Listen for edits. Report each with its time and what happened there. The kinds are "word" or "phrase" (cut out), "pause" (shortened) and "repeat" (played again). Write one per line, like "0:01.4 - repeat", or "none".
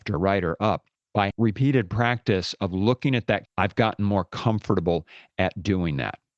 0:01.3 - word
0:03.5 - word